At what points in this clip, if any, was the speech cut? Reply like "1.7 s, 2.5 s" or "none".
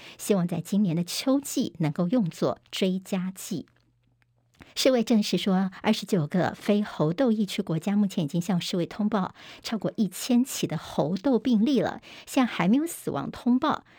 4.7 s